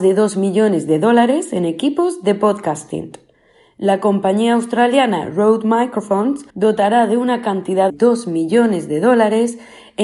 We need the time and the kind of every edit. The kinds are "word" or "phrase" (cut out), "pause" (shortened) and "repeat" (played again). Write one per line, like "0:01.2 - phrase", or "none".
0:06.5 - pause
0:07.9 - phrase